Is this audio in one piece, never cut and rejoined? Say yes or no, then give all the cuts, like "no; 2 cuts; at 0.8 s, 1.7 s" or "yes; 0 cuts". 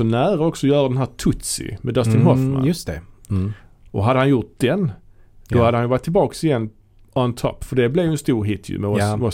yes; 0 cuts